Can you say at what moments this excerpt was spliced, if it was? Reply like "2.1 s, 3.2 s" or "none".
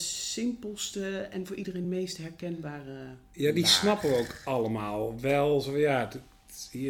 none